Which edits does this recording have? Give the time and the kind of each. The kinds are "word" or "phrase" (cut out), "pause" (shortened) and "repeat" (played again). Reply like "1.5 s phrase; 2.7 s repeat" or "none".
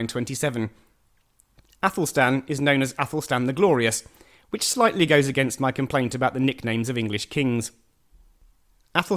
none